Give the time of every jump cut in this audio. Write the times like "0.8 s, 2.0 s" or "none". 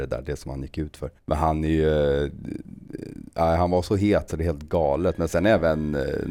1.2 s, 4.3 s